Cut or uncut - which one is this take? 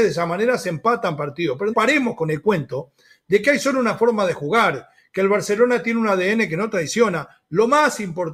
cut